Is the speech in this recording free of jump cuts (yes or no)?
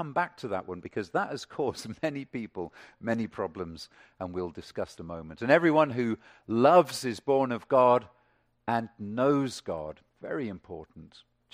no